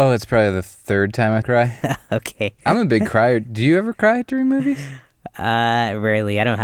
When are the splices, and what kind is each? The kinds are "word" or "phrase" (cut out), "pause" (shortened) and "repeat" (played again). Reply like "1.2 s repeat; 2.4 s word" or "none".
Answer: 1.4 s phrase